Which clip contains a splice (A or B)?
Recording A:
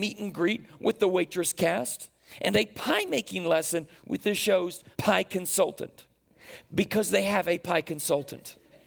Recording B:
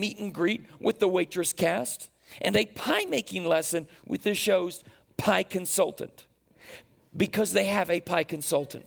A